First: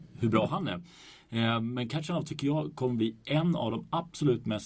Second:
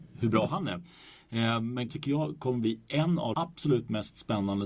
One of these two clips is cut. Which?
second; 2 cuts; at 1.9 s, 3.3 s

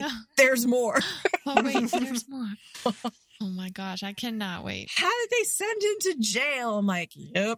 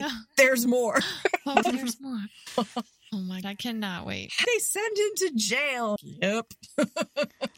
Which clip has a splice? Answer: second; 4 cuts; at 1.6 s, 3.4 s, 4.4 s, 6.0 s

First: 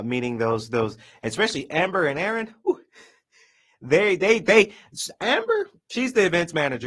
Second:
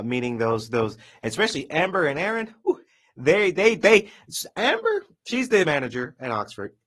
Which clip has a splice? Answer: second; 2 cuts; at 2.9 s, 5.6 s

